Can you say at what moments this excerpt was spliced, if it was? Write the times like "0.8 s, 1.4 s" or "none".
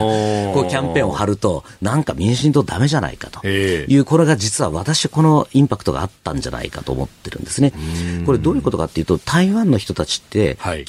8.2 s